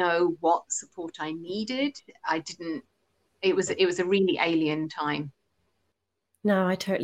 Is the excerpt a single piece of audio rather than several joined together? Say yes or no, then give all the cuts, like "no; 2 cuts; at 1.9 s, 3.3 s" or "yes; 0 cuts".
yes; 0 cuts